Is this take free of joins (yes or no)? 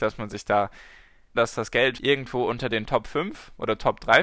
no